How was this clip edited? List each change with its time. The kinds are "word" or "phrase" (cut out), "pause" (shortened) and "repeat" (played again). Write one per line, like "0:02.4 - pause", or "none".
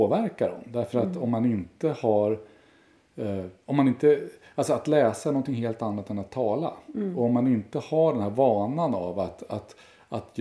0:03.6 - pause